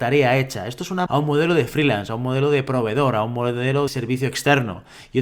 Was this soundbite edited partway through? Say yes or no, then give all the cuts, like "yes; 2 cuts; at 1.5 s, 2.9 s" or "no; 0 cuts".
yes; 2 cuts; at 1.1 s, 3.9 s